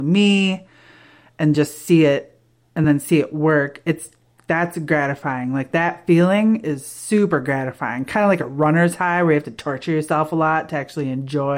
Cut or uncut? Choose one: uncut